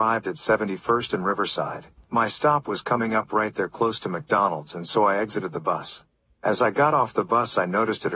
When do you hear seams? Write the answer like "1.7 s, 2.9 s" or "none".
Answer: none